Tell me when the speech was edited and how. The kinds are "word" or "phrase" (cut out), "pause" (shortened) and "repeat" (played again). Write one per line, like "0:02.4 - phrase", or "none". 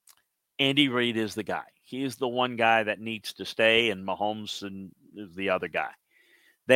none

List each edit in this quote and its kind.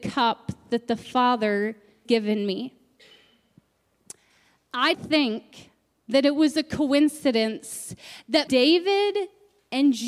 0:02.1 - word
0:04.9 - word
0:08.5 - word

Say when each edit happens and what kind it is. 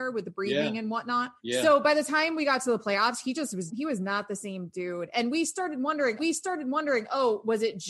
0:01.4 - pause
0:03.7 - word
0:06.2 - repeat

